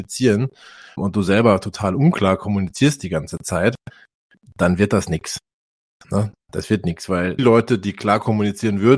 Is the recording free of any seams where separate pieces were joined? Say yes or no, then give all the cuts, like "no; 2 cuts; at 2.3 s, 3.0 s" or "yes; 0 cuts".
no; 2 cuts; at 1.0 s, 7.4 s